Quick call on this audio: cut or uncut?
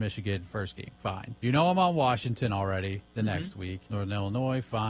cut